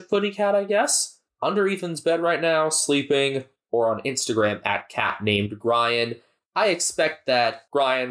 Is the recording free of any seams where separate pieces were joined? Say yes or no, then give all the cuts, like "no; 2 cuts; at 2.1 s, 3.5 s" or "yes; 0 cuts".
yes; 0 cuts